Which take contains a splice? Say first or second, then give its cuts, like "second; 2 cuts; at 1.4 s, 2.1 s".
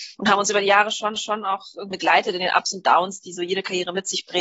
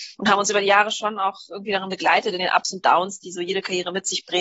first; 2 cuts; at 1.2 s, 1.9 s